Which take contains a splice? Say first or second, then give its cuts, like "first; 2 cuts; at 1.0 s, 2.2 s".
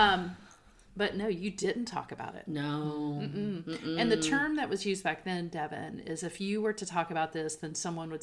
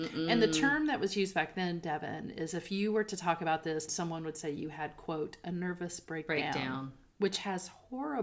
second; 1 cut; at 3.9 s